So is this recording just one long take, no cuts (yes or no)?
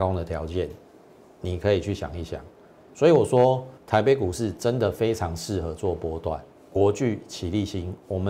no